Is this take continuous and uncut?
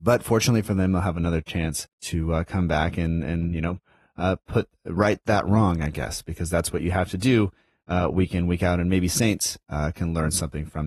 no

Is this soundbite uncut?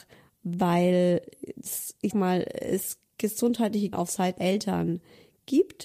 no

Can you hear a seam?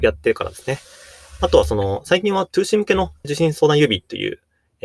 yes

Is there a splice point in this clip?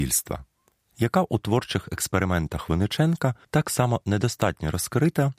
yes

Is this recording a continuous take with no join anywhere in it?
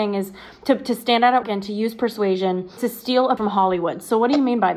no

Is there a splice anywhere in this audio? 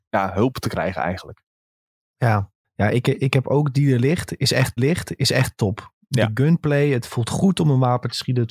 yes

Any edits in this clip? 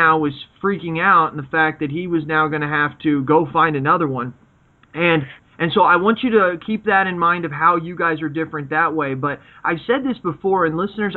no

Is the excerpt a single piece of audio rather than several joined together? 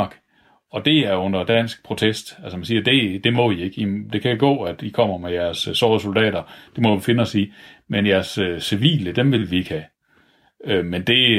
yes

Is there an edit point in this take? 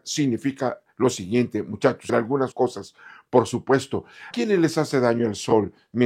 yes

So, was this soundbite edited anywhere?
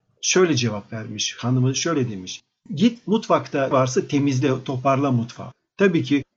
yes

